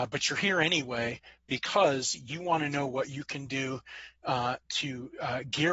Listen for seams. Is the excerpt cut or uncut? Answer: uncut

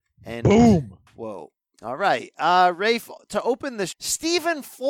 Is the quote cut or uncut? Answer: cut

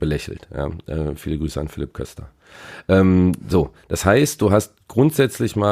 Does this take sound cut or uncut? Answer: uncut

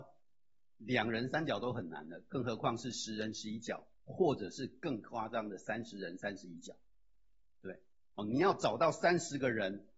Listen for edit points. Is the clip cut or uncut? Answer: uncut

